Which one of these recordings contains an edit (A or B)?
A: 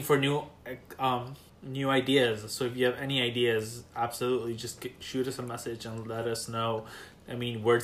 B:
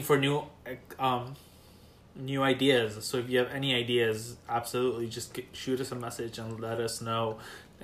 A